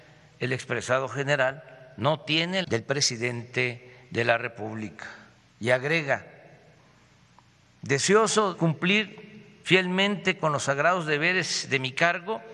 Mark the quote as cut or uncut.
cut